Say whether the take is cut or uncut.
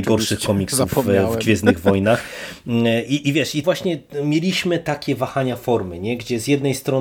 cut